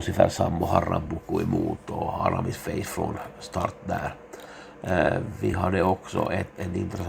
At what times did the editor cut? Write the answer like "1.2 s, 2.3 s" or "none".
none